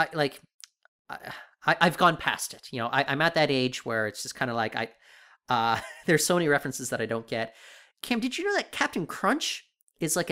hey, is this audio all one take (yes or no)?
yes